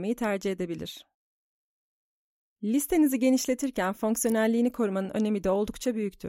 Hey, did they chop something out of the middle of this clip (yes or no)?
no